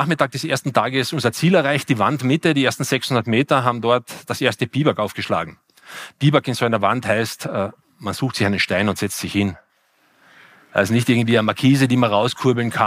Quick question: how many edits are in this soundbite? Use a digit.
0